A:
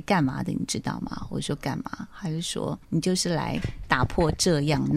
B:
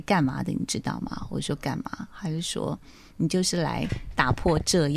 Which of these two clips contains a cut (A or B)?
A